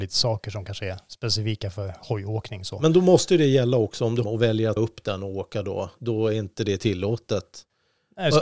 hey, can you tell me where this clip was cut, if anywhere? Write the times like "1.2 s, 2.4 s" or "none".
4.2 s, 4.8 s